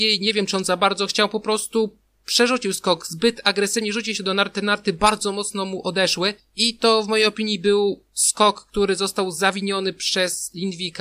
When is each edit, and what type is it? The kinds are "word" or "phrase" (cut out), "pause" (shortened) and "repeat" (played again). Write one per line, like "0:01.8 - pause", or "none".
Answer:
none